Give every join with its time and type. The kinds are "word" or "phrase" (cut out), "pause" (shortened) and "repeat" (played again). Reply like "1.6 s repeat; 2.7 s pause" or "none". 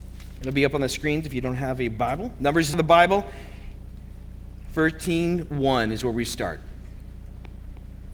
2.7 s phrase